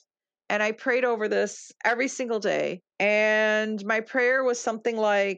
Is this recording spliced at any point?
yes; 1 cut; at 2.9 s

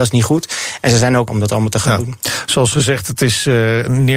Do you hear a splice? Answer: yes; 1 cut; at 1.3 s

